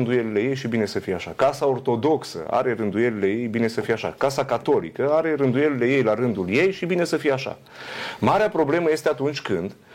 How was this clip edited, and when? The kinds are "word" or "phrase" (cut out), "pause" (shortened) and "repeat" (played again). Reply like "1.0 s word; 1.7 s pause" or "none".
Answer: none